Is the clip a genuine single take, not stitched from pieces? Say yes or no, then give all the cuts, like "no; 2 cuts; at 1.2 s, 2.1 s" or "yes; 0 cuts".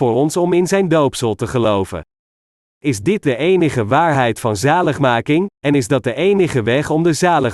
yes; 0 cuts